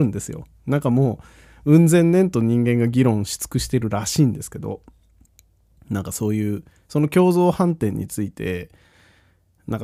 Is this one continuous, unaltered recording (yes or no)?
yes